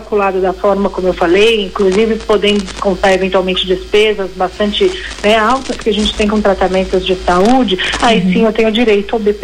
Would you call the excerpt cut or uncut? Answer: uncut